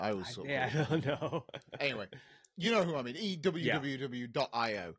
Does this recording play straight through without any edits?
yes; 0 cuts

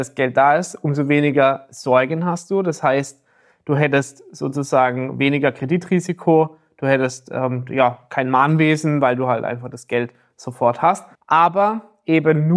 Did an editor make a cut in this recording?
yes; 1 cut; at 11.1 s

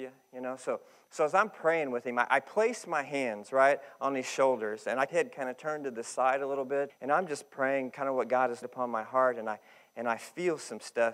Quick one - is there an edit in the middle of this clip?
yes; 3 cuts; at 5.1 s, 6.9 s, 8.6 s

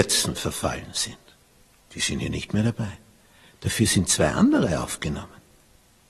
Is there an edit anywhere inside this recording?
no; 0 cuts

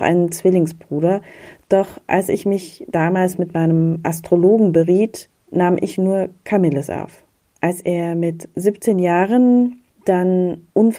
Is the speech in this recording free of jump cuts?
yes; 0 cuts

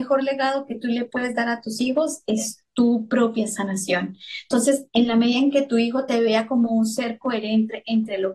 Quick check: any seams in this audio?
no; 0 cuts

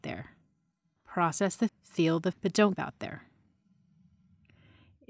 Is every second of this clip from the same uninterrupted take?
no; 3 cuts; at 1.7 s, 2.3 s, 2.7 s

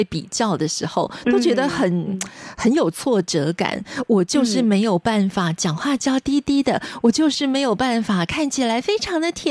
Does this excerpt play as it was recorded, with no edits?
yes; 0 cuts

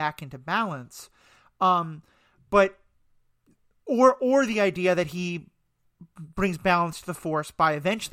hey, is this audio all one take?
yes; 0 cuts

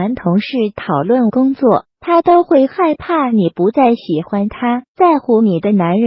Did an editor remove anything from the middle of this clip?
yes; 2 cuts; at 1.9 s, 4.9 s

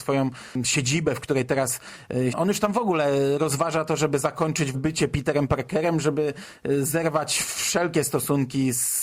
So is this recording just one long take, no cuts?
no; 2 cuts; at 2.3 s, 4.7 s

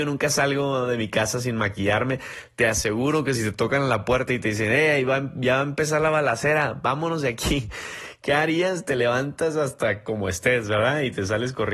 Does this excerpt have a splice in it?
no; 0 cuts

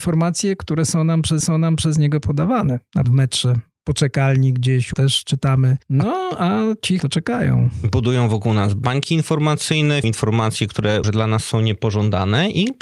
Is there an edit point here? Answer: yes; 7 cuts; at 1.4 s, 3.0 s, 3.8 s, 4.9 s, 7.0 s, 10.0 s, 11.0 s

